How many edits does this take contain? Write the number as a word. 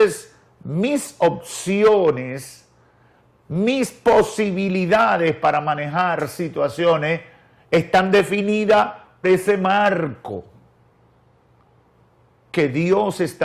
one